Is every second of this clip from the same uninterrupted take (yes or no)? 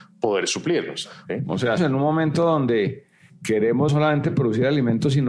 no